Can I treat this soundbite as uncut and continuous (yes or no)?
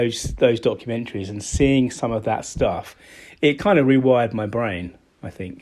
yes